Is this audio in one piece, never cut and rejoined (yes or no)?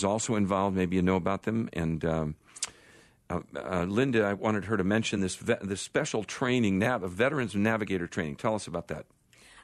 yes